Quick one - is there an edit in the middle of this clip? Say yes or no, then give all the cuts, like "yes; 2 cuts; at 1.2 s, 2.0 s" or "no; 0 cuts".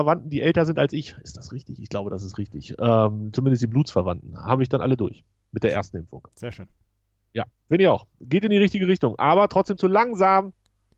no; 0 cuts